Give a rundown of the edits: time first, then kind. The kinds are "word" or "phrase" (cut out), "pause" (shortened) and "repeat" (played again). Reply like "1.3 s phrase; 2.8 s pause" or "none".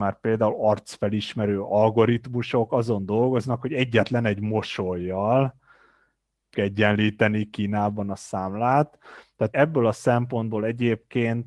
6.5 s word; 9.5 s word